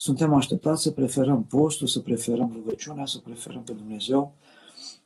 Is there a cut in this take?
no; 0 cuts

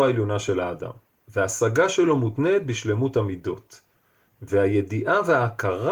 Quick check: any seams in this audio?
no; 0 cuts

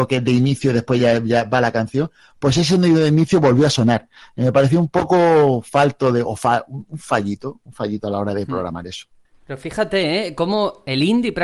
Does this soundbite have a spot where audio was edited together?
no; 0 cuts

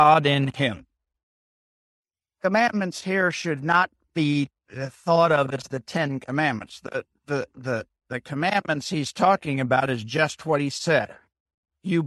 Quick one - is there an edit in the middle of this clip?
no; 0 cuts

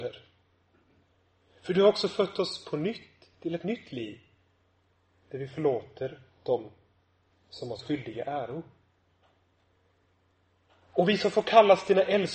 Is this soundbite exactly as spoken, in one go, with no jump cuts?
yes; 0 cuts

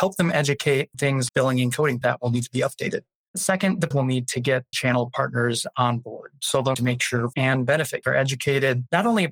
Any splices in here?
yes; 8 cuts; at 0.9 s, 1.3 s, 2.0 s, 3.9 s, 4.7 s, 6.7 s, 7.3 s, 8.0 s

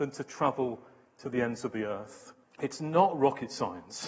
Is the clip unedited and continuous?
no; 1 cut; at 2.4 s

